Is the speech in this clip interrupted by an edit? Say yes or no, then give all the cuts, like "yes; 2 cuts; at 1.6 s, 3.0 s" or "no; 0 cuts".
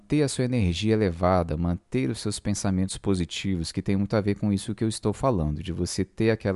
no; 0 cuts